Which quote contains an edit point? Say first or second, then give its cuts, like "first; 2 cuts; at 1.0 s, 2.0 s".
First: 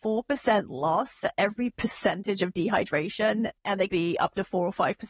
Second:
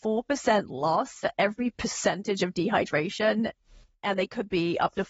first; 2 cuts; at 3.6 s, 3.9 s